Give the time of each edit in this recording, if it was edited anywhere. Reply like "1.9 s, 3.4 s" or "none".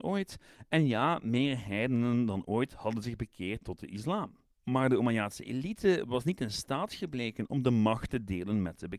4.5 s